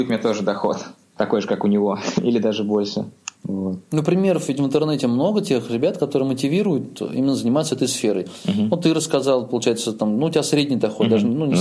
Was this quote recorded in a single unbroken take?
no; 1 cut; at 3.3 s

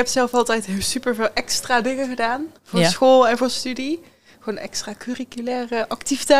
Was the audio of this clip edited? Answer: yes; 2 cuts; at 2.6 s, 5.0 s

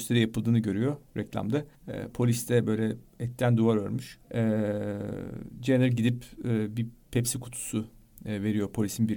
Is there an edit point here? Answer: yes; 2 cuts; at 1.7 s, 4.2 s

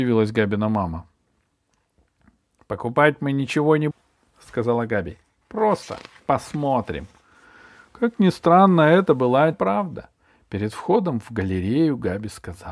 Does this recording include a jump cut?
yes; 2 cuts; at 3.9 s, 9.5 s

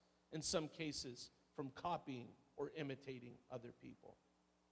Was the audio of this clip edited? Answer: no; 0 cuts

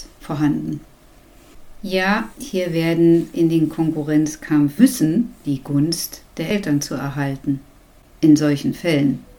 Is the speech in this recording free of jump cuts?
no; 4 cuts; at 2.3 s, 3.3 s, 4.8 s, 5.4 s

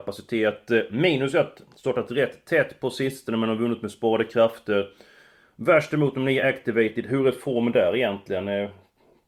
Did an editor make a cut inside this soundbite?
no; 0 cuts

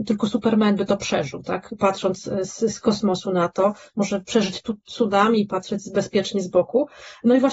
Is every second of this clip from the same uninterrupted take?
yes; 0 cuts

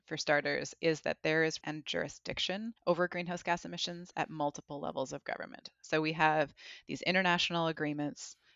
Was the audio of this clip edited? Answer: yes; 2 cuts; at 1.6 s, 2.8 s

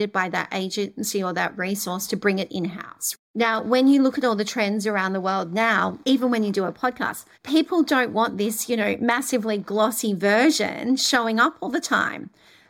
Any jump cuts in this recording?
yes; 2 cuts; at 6.0 s, 7.3 s

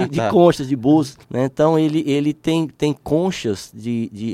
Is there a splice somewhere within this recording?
yes; 1 cut; at 1.2 s

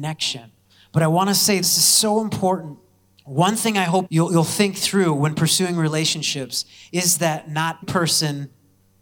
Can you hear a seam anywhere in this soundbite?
yes; 3 cuts; at 1.6 s, 4.1 s, 7.8 s

